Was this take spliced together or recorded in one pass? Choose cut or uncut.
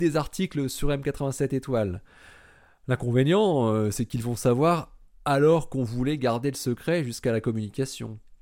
uncut